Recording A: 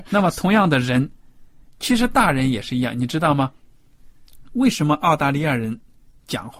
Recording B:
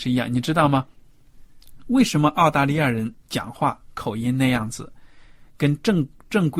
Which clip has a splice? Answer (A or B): B